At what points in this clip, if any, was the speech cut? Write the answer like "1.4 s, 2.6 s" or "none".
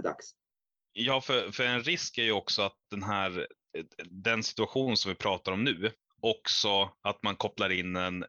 none

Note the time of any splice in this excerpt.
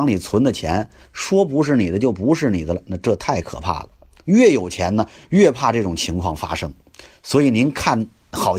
none

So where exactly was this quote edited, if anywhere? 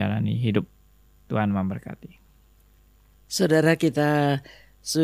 none

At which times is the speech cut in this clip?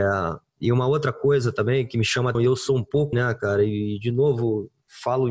2.3 s, 3.1 s

